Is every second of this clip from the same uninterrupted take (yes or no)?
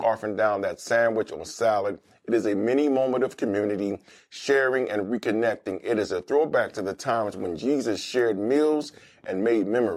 yes